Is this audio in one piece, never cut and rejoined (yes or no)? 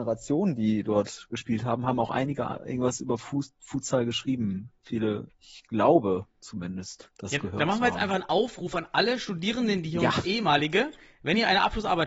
no